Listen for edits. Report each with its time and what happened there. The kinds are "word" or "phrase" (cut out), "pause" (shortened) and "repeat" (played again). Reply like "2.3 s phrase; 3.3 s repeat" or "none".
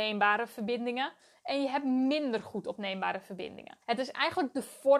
3.8 s pause